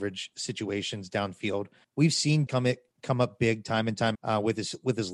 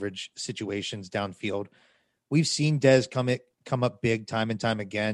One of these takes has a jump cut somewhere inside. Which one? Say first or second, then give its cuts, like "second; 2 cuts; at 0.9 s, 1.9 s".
first; 3 cuts; at 1.8 s, 2.5 s, 4.1 s